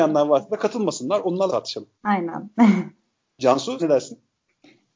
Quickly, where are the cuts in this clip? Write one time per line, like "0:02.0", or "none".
0:01.5
0:02.0
0:03.8